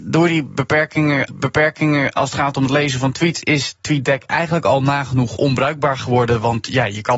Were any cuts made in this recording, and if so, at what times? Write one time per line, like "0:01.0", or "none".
0:01.3